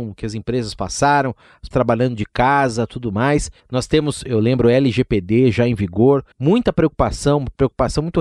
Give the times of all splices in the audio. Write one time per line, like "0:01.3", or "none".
0:01.7
0:03.6
0:06.3